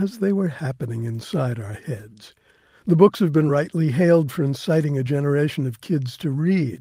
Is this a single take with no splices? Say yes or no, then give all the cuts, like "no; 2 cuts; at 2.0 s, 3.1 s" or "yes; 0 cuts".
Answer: yes; 0 cuts